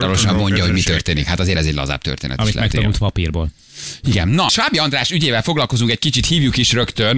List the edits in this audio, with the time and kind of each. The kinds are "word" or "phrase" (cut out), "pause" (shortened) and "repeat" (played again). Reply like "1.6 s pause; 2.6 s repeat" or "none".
1.5 s word; 4.5 s word